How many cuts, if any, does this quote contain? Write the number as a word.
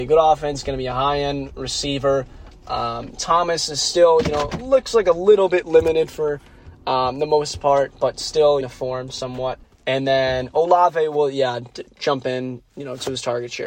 three